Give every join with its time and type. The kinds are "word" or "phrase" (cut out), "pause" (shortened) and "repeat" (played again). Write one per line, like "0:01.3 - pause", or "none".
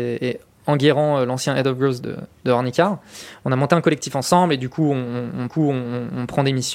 0:02.0 - word
0:05.5 - repeat